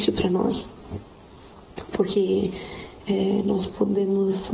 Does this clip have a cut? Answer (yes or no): no